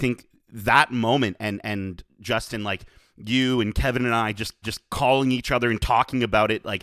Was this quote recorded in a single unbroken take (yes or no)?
no